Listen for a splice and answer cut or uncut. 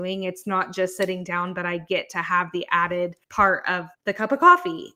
cut